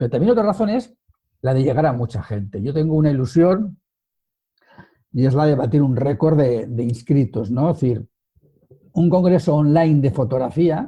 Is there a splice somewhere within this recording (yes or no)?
no